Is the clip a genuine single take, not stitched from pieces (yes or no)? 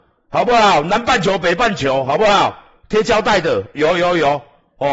yes